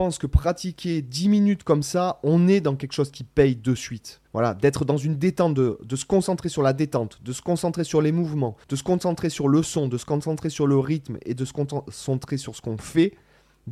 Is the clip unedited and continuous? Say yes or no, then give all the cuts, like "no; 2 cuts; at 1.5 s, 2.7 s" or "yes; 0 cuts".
no; 2 cuts; at 4.2 s, 8.6 s